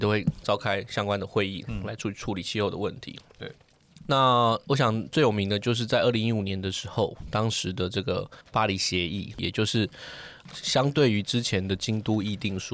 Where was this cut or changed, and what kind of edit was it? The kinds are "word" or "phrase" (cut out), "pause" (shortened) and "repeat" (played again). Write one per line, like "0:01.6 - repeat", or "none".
0:04.0 - word
0:08.4 - pause
0:09.3 - word